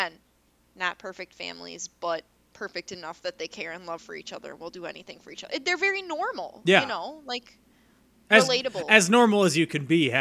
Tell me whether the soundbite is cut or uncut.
uncut